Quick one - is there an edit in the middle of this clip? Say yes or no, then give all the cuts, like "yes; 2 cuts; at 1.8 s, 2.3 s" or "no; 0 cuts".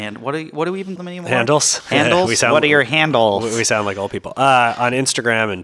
yes; 1 cut; at 1.0 s